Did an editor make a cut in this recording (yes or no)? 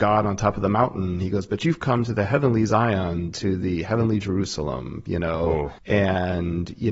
yes